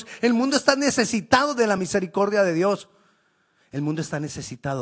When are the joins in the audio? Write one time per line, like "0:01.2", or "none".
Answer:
none